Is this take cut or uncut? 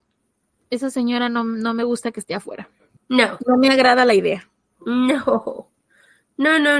uncut